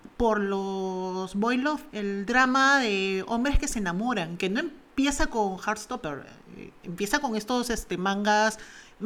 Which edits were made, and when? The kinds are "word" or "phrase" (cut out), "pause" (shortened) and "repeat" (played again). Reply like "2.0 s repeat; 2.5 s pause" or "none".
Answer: 1.9 s pause